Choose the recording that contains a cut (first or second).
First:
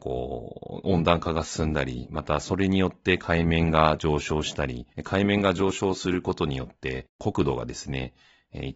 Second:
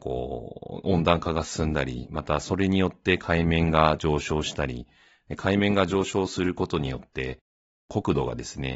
first